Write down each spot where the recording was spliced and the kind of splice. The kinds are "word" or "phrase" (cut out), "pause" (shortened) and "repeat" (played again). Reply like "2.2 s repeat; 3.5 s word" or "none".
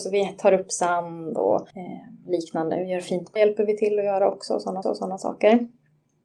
1.7 s pause; 3.4 s word; 4.8 s repeat